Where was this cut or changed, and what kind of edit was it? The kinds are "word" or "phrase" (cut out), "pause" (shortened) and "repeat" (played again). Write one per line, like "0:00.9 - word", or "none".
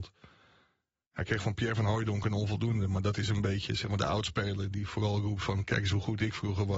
none